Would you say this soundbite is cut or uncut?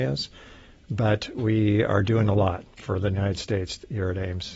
uncut